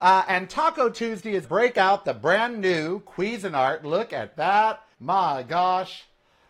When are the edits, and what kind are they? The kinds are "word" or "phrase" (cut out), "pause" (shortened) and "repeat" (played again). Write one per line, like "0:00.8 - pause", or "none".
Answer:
0:01.4 - phrase
0:04.9 - pause